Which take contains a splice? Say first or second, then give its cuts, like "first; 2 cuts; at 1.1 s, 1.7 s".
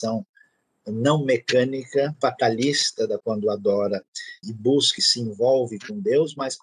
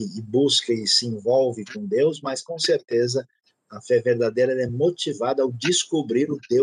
first; 4 cuts; at 2.2 s, 3.2 s, 4.4 s, 5.0 s